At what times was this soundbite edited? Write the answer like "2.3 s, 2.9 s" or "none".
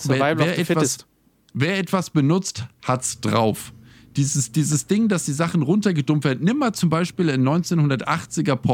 none